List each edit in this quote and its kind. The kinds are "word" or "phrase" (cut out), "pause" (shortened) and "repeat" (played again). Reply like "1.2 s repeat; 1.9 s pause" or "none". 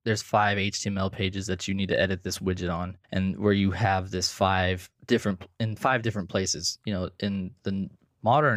3.0 s pause; 5.0 s pause

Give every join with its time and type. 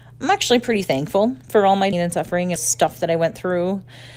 1.4 s pause; 1.9 s phrase; 2.6 s phrase

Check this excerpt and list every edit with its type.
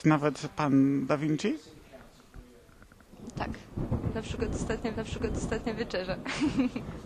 1.1 s word; 4.9 s repeat

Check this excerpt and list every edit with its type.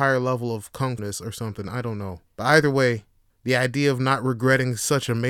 1.0 s word; 2.3 s pause; 3.3 s pause

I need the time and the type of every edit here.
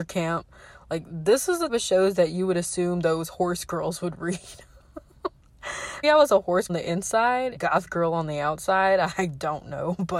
1.7 s word; 6.0 s word; 6.7 s phrase; 7.6 s phrase

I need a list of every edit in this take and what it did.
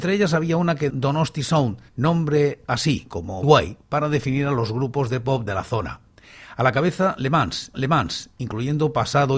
0.9 s word; 1.9 s pause; 3.4 s word; 5.5 s phrase; 7.7 s repeat

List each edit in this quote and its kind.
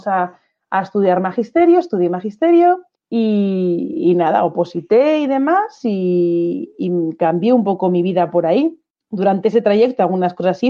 2.9 s pause; 8.9 s pause

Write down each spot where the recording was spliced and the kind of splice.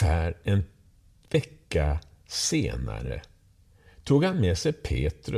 none

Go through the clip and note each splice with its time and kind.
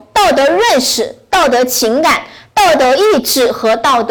none

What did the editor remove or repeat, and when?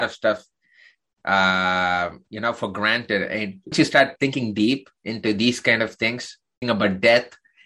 2.2 s pause; 3.7 s word; 6.6 s word

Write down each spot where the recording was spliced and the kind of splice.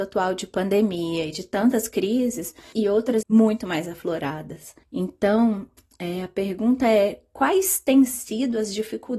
2.7 s word; 3.2 s phrase; 4.8 s pause

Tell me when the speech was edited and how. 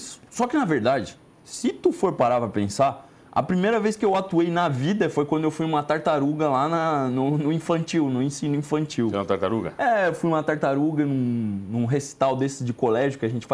none

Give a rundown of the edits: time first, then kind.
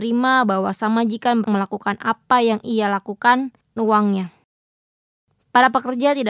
1.4 s word; 2.6 s word; 3.8 s word

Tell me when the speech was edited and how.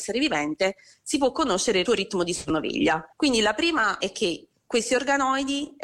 1.9 s phrase; 3.1 s pause; 4.0 s word

